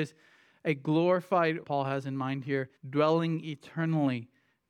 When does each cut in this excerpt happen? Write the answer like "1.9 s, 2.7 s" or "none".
1.6 s, 2.8 s